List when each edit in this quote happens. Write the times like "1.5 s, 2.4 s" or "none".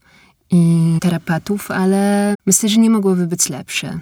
1.0 s, 2.3 s